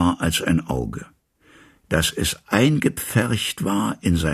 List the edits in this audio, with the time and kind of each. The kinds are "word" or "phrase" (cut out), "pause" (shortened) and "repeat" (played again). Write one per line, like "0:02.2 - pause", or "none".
none